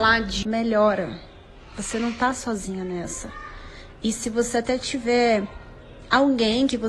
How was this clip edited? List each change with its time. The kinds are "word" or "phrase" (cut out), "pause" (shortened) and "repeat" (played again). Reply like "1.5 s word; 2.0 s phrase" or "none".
none